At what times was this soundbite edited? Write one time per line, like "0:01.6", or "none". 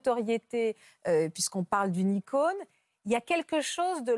none